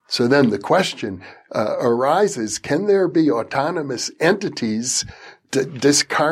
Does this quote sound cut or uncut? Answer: uncut